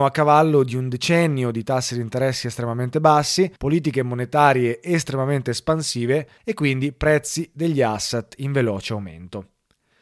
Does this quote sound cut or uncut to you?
cut